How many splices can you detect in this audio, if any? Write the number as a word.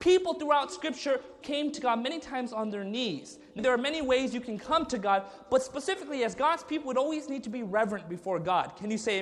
two